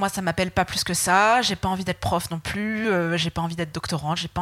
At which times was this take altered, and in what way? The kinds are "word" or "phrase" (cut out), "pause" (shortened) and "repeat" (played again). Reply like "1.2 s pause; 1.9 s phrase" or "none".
none